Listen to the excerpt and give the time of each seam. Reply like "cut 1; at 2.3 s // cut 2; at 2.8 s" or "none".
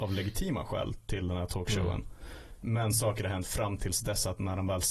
none